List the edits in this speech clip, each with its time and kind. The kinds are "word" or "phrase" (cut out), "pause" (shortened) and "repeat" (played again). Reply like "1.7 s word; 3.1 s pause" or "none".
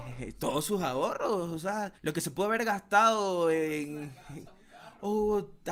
2.0 s pause